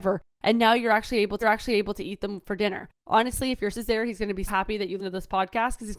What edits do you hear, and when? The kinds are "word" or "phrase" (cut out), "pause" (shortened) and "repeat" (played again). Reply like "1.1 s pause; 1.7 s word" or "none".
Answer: 1.4 s repeat; 3.7 s word; 4.5 s word; 5.0 s word

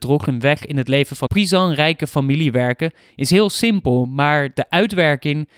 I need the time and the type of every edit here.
1.3 s word

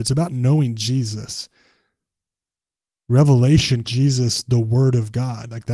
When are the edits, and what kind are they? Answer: 3.8 s word

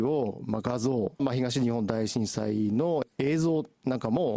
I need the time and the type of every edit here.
1.2 s phrase

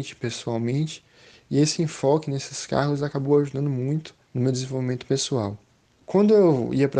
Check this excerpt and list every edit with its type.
none

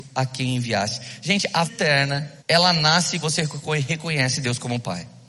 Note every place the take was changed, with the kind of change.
1.6 s word; 2.4 s pause; 3.2 s word

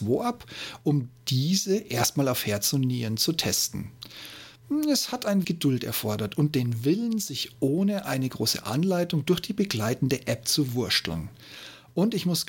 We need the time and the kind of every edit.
5.4 s word

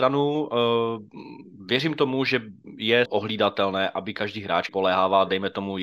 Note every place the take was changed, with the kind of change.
3.1 s word; 4.7 s word

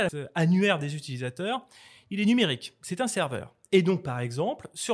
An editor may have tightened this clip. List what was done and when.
none

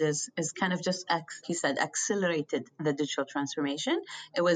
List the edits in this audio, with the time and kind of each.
1.4 s word

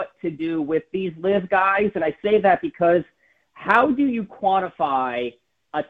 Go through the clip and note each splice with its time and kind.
none

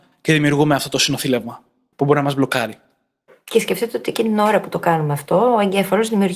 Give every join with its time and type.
none

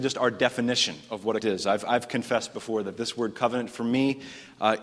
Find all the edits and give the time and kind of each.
1.4 s word

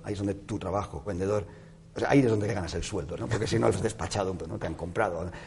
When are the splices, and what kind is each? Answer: 1.1 s word; 1.9 s word; 2.5 s word; 3.2 s word; 3.7 s word; 4.4 s word

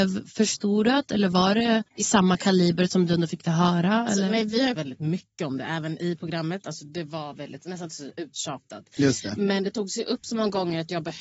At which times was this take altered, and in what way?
1.9 s pause; 4.8 s word

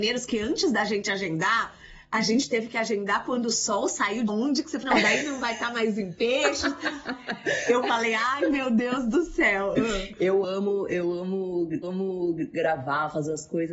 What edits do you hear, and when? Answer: 4.3 s phrase; 4.8 s word; 10.4 s phrase; 11.8 s repeat

